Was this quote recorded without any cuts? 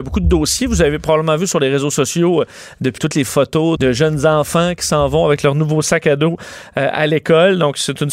no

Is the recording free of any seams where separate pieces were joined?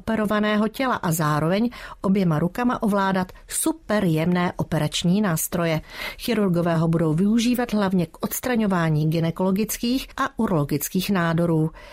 yes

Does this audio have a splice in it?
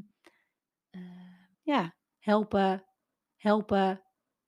yes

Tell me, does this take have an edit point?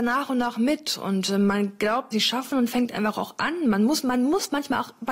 yes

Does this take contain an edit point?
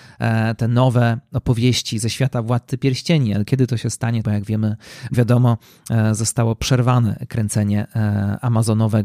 yes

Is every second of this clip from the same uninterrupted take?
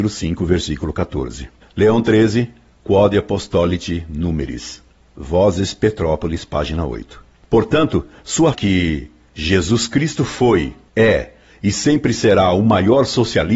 no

